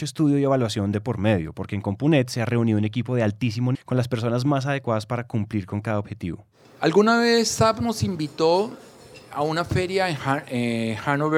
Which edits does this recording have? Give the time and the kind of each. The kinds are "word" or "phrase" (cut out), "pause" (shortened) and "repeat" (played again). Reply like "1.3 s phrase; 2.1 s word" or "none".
3.7 s word